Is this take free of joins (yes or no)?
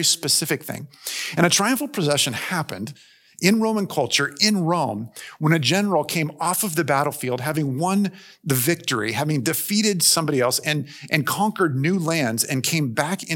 yes